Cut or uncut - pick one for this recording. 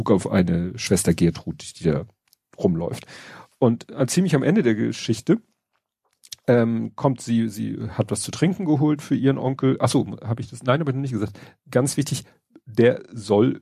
uncut